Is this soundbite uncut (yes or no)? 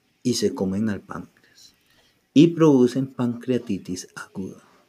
yes